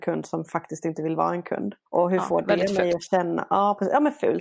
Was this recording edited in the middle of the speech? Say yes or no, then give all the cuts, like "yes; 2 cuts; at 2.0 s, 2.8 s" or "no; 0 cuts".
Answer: no; 0 cuts